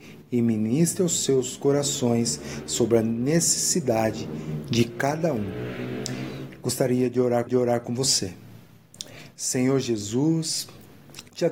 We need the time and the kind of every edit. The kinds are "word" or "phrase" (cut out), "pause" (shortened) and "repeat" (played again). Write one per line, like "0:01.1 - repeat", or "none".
0:07.5 - repeat